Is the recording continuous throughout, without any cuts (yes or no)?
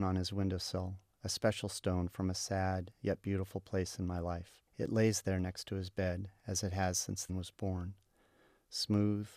no